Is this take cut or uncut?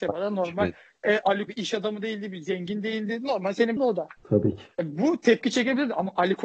cut